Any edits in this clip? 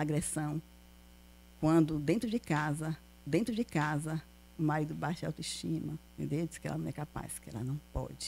yes; 2 cuts; at 3.3 s, 6.1 s

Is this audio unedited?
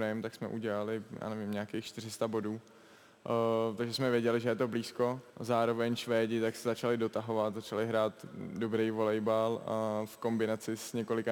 no; 1 cut; at 5.3 s

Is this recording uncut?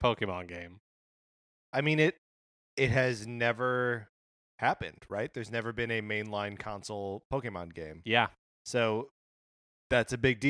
yes; 0 cuts

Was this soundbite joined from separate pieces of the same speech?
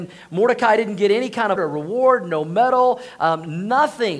yes; 1 cut; at 1.6 s

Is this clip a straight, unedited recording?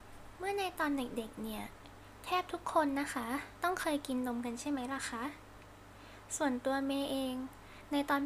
yes; 0 cuts

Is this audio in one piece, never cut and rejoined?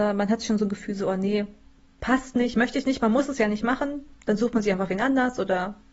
yes; 0 cuts

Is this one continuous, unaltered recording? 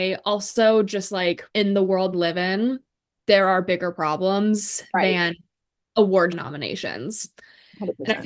no; 3 cuts; at 1.5 s, 2.1 s, 6.3 s

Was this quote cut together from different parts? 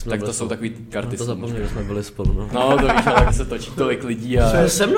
yes; 3 cuts; at 0.9 s, 2.5 s, 3.3 s

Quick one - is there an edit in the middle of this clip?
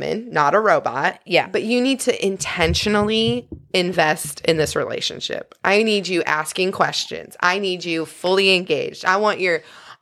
no; 0 cuts

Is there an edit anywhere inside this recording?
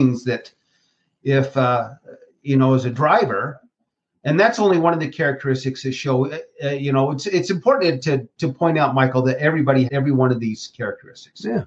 yes; 1 cut; at 9.9 s

